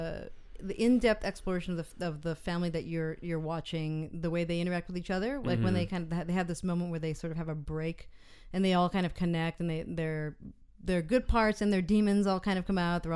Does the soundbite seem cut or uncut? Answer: uncut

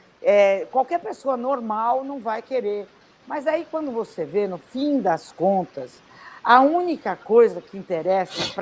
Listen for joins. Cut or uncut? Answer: uncut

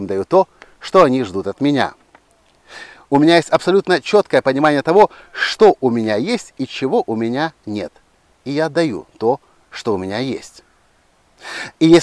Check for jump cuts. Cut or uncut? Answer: uncut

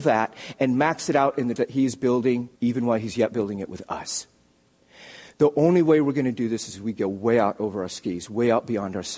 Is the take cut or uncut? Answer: cut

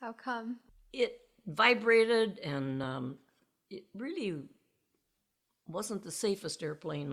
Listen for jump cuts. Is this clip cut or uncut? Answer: uncut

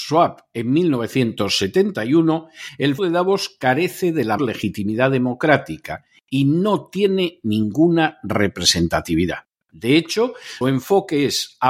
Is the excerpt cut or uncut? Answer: cut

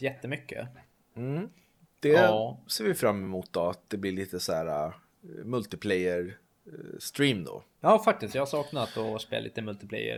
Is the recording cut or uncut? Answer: uncut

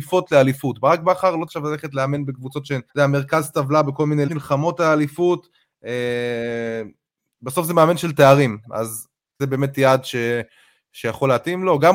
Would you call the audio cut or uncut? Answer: cut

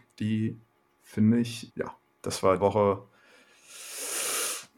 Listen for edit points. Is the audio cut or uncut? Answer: cut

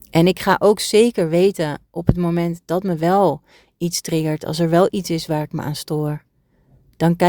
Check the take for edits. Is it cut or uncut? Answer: uncut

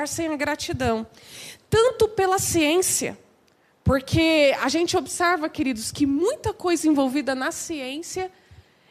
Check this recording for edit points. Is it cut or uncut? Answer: uncut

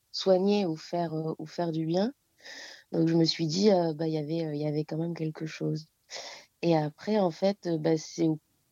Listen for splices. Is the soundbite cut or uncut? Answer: uncut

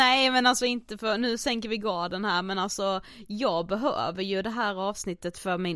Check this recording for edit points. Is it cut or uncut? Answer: uncut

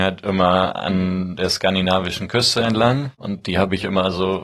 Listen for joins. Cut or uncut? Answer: cut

